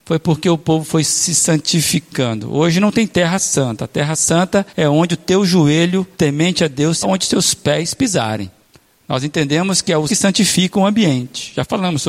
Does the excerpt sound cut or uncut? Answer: cut